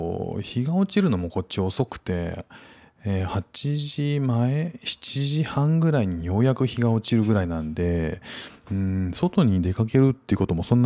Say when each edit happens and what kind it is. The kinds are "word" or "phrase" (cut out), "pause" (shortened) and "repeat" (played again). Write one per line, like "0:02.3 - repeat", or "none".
none